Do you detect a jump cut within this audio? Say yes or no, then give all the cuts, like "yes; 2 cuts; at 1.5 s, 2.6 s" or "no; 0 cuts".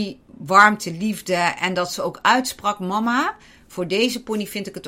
no; 0 cuts